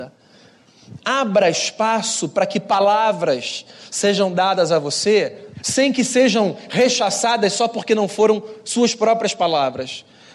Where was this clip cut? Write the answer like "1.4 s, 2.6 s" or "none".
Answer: 5.5 s